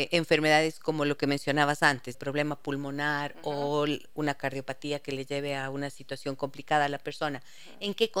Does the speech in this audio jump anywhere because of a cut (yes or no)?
yes